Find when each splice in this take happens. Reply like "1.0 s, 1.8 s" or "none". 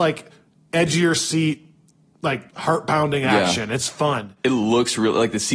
2.5 s